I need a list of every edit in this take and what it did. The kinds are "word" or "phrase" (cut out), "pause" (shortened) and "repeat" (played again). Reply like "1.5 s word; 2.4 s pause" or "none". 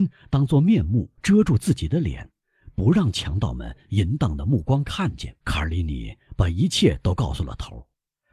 1.2 s pause; 5.4 s pause